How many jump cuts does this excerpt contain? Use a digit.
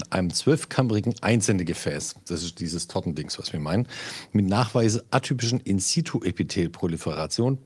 1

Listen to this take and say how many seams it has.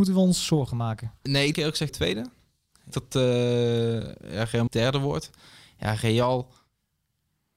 4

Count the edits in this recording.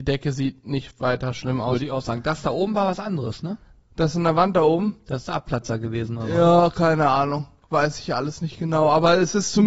0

